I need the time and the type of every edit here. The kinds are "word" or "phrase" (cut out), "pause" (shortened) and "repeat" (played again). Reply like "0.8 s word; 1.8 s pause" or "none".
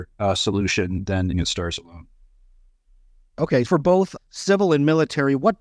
1.3 s phrase; 3.7 s word; 4.2 s word

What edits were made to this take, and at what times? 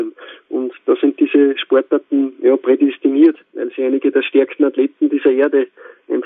none

